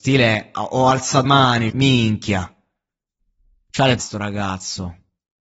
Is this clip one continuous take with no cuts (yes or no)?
no